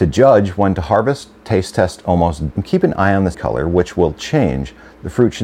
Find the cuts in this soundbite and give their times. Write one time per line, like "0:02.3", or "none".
0:02.5
0:03.3

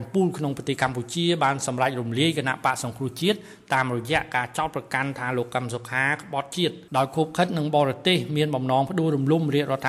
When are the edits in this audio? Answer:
0:06.9

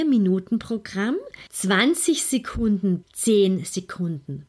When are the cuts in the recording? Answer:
0:01.5
0:03.0

